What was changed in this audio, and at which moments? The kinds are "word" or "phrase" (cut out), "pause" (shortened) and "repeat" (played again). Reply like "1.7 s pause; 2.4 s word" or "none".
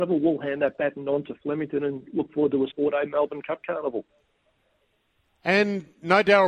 2.7 s word